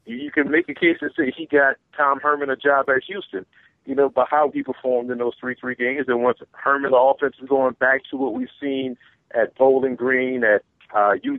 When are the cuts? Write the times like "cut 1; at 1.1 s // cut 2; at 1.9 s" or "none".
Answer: cut 1; at 4.5 s // cut 2; at 5.6 s // cut 3; at 6.9 s